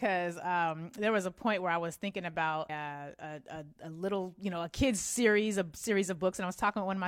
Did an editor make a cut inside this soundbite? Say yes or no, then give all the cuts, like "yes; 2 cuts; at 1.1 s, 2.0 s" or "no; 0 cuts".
yes; 1 cut; at 2.7 s